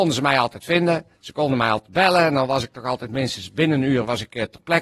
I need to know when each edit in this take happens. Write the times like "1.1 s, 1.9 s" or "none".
1.1 s